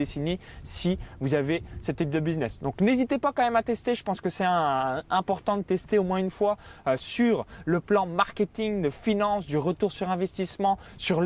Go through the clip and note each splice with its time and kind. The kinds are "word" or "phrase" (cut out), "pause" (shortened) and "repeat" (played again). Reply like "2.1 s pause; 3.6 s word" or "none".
none